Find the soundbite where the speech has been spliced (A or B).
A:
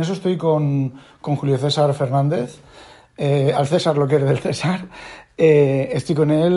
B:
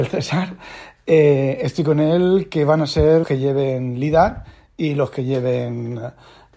B